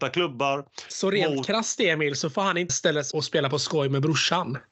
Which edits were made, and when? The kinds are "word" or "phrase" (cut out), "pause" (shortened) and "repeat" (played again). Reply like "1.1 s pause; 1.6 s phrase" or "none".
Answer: 2.7 s word; 3.1 s word